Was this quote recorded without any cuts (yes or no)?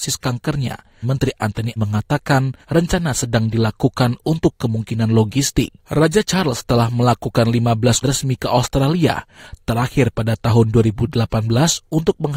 no